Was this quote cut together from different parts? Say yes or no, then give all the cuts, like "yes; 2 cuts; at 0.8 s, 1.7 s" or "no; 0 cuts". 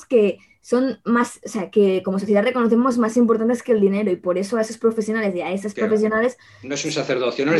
no; 0 cuts